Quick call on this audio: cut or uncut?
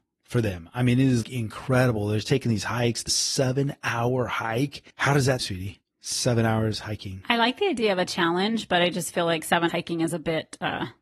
cut